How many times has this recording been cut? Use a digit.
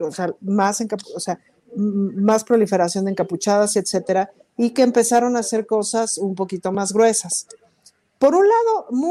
0